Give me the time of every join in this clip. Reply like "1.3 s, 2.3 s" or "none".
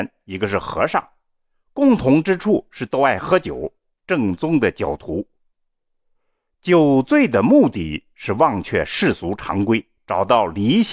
none